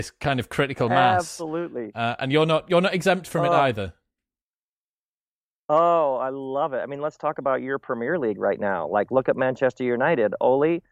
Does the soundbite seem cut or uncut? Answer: uncut